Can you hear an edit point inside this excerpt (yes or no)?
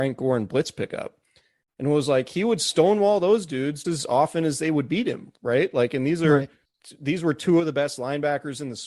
yes